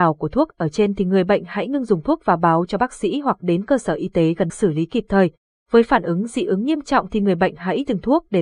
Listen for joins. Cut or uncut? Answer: cut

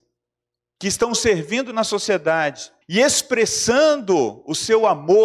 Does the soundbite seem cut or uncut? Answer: cut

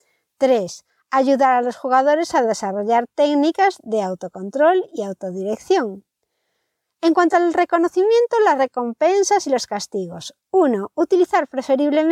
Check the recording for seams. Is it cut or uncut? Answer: uncut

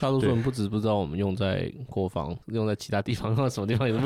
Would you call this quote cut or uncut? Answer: cut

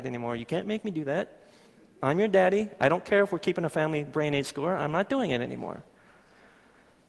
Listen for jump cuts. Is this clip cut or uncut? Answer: uncut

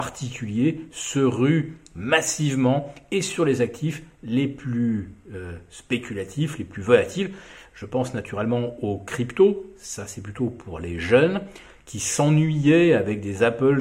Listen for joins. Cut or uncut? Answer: uncut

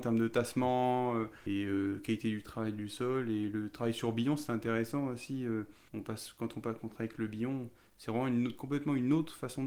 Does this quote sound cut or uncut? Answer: cut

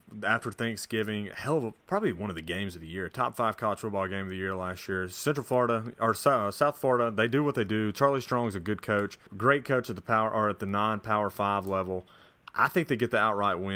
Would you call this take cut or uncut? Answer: cut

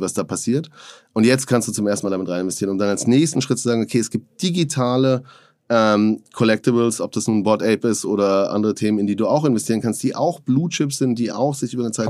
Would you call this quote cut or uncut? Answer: uncut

